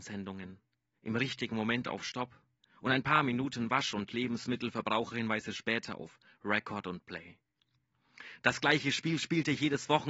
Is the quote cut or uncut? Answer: uncut